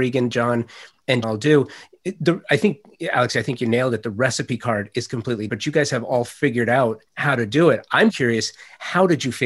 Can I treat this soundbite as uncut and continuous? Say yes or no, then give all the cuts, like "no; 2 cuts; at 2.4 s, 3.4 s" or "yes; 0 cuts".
no; 4 cuts; at 1.2 s, 5.5 s, 7.1 s, 8.1 s